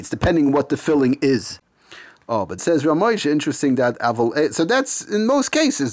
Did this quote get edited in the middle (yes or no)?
yes